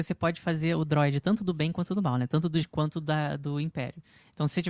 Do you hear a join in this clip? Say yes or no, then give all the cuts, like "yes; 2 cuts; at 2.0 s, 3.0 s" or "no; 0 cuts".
yes; 1 cut; at 2.6 s